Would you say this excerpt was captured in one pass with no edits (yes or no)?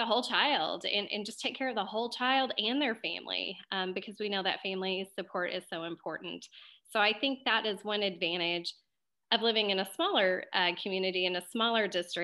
yes